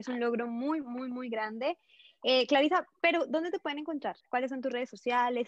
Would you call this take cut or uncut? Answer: cut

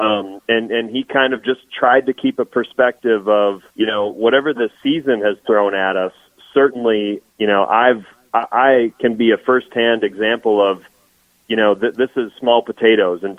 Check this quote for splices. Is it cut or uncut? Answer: cut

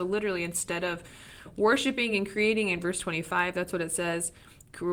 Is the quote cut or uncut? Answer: uncut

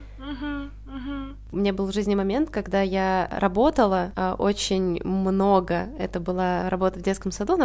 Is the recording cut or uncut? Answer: uncut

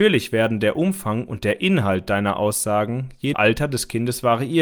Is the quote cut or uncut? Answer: cut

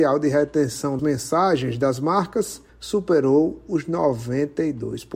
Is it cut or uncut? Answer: cut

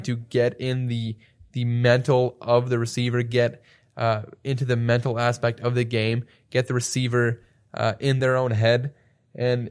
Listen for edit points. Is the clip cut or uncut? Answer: uncut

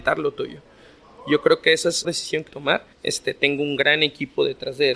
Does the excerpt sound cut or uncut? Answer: cut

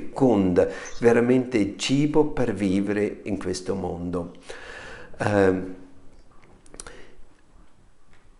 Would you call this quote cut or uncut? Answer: uncut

